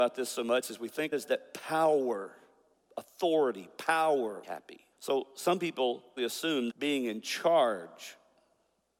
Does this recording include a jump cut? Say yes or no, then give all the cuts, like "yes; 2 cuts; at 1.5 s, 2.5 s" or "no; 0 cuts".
yes; 6 cuts; at 1.1 s, 2.7 s, 4.4 s, 4.9 s, 6.2 s, 6.7 s